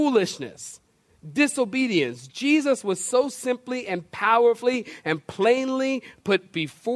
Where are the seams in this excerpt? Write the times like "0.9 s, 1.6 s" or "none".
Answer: none